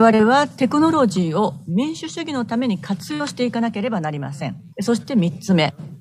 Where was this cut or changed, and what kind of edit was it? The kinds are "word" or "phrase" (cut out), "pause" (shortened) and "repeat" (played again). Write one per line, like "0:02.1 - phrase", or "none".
0:04.7 - pause